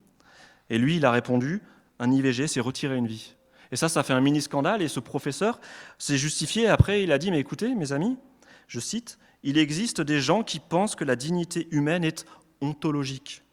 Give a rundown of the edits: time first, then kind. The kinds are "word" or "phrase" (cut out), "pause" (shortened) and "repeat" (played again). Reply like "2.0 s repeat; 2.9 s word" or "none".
none